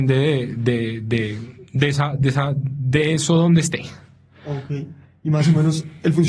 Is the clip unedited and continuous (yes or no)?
yes